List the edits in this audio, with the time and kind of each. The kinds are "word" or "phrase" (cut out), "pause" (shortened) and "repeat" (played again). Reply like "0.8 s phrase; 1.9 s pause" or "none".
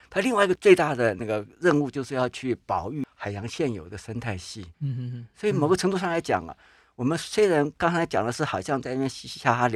4.7 s pause